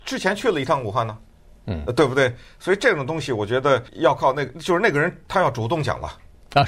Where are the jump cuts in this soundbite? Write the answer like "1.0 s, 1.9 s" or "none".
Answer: 3.9 s